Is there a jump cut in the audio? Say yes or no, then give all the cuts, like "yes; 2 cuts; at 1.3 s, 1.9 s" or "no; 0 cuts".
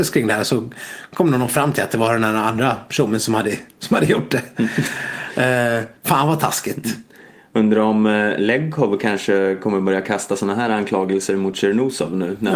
no; 0 cuts